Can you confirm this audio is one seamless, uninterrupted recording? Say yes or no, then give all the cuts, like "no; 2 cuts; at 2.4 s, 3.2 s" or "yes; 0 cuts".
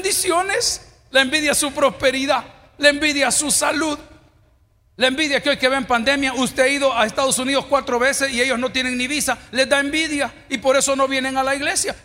yes; 0 cuts